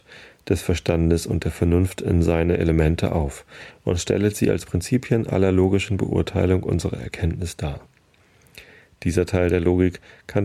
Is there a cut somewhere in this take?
no; 0 cuts

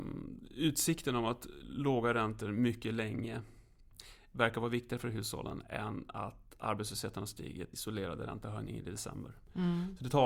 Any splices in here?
yes; 1 cut; at 7.7 s

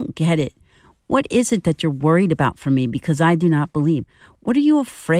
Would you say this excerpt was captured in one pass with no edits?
yes; 0 cuts

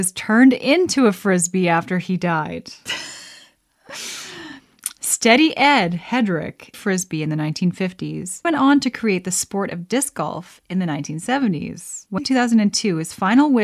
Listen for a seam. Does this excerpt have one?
yes; 3 cuts; at 6.7 s, 8.4 s, 12.2 s

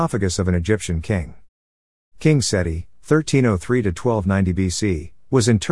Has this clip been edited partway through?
no; 0 cuts

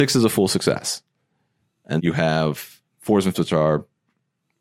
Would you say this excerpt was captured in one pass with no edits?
no; 2 cuts; at 2.0 s, 3.3 s

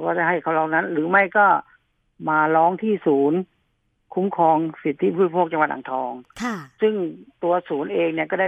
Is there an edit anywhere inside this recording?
no; 0 cuts

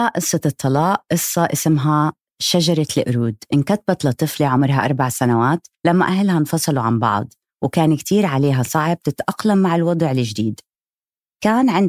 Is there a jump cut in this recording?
yes; 1 cut; at 5.7 s

